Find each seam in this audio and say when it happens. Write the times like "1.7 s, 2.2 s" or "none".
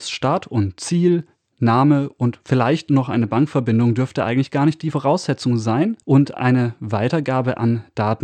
6.0 s